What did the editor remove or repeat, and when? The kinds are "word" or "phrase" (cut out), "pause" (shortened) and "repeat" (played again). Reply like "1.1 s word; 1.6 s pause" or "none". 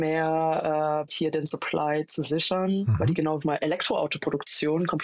1.1 s word; 3.4 s phrase